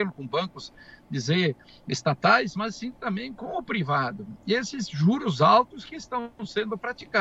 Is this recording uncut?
yes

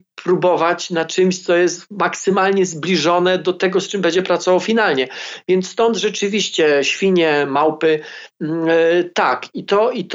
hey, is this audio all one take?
yes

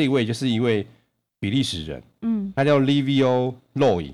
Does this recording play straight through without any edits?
yes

